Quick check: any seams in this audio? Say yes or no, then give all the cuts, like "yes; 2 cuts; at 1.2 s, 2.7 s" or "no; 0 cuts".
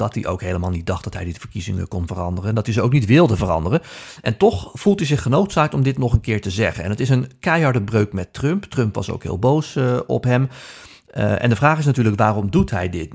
no; 0 cuts